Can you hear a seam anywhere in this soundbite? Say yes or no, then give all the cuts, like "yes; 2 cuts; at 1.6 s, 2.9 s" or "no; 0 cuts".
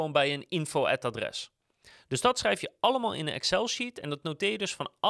no; 0 cuts